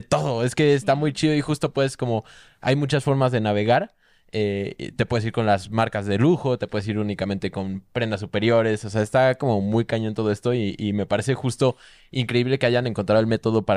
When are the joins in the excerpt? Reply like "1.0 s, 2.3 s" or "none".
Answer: none

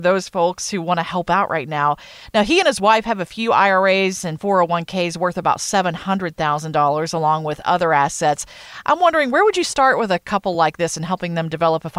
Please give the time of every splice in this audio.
none

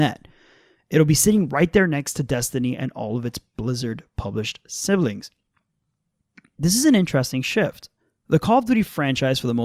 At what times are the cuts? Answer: none

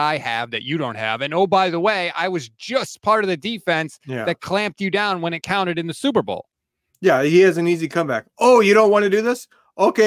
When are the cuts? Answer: none

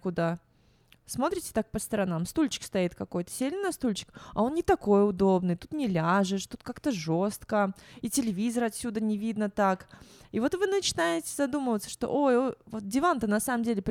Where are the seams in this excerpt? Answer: none

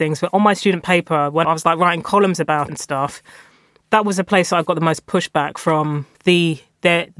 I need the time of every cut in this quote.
1.4 s, 2.7 s, 6.1 s

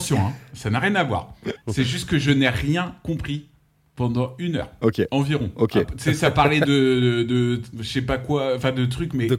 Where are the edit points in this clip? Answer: none

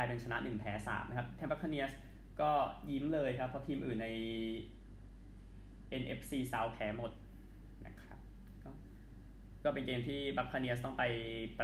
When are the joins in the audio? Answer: 1.5 s

